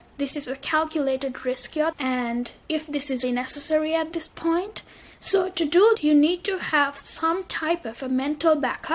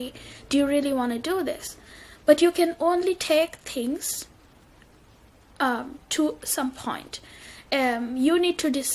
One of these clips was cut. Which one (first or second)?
first